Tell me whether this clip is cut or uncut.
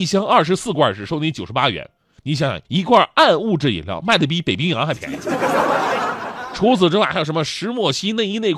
cut